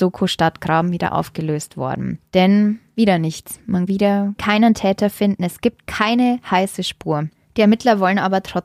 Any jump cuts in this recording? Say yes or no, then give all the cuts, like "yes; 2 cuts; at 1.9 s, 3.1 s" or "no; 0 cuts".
yes; 1 cut; at 3.9 s